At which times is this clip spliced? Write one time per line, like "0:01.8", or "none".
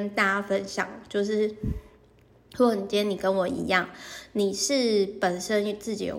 none